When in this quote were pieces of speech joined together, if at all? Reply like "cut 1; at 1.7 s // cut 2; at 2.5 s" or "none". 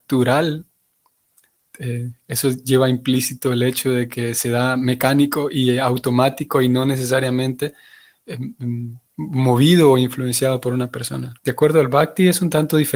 cut 1; at 9.1 s // cut 2; at 11.4 s

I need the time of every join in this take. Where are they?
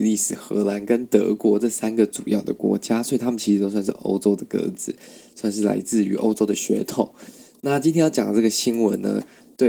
none

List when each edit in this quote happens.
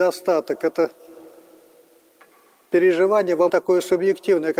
cut 1; at 3.5 s

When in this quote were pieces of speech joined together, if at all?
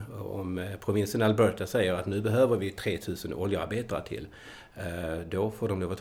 none

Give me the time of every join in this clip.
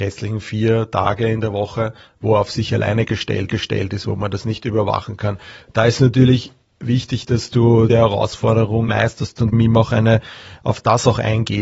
cut 1; at 3.5 s // cut 2; at 7.9 s // cut 3; at 8.9 s // cut 4; at 9.5 s

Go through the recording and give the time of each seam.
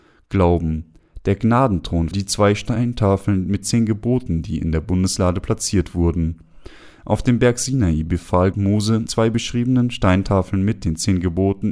cut 1; at 2.1 s // cut 2; at 3.6 s // cut 3; at 8.5 s // cut 4; at 9.1 s

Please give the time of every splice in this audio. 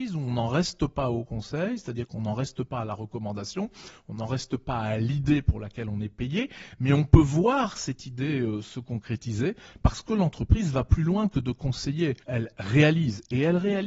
cut 1; at 12.2 s

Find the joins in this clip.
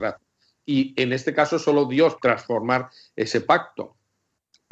cut 1; at 2.2 s

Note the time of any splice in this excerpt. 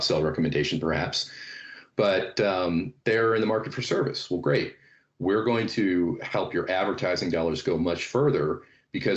none

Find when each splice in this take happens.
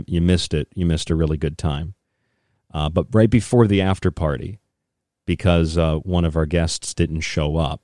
none

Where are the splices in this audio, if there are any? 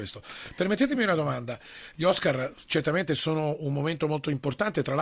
none

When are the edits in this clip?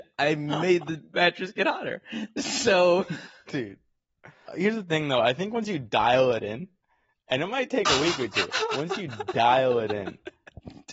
cut 1; at 4.5 s

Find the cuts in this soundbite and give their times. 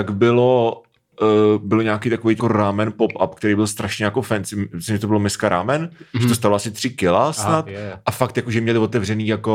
cut 1; at 2.4 s

